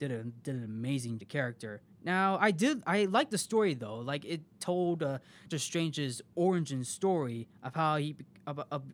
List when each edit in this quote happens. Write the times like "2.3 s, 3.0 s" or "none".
1.2 s, 5.5 s